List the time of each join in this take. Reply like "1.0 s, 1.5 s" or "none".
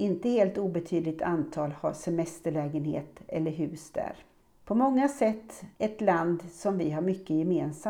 4.4 s, 5.7 s